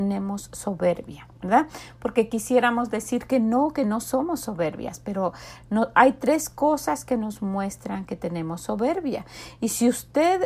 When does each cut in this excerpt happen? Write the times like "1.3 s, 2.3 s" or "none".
1.3 s